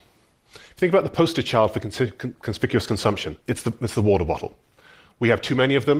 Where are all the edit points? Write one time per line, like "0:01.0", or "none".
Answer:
0:03.4